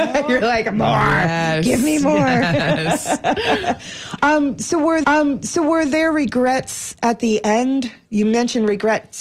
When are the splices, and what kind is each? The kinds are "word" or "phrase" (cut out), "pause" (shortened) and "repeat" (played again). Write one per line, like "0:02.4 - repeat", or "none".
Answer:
0:05.0 - repeat